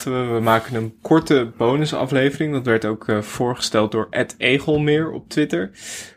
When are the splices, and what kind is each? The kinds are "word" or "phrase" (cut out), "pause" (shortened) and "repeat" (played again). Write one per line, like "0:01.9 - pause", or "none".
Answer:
0:01.0 - pause